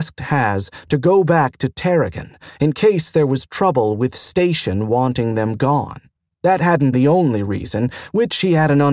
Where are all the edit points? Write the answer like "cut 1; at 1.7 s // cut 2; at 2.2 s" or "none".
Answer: cut 1; at 6.1 s // cut 2; at 6.9 s